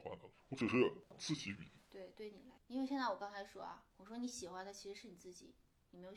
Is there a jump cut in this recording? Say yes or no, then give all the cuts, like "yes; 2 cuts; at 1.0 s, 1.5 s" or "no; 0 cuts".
yes; 1 cut; at 3.9 s